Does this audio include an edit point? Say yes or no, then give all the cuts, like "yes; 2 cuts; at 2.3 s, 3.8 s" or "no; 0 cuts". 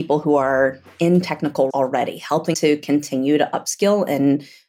yes; 2 cuts; at 1.7 s, 2.5 s